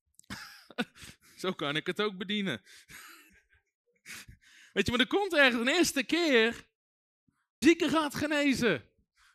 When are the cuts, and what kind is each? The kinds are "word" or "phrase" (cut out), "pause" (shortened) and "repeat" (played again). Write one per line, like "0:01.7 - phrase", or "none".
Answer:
0:03.3 - pause
0:07.6 - phrase